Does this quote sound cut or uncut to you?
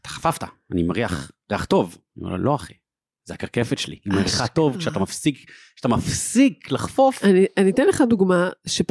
uncut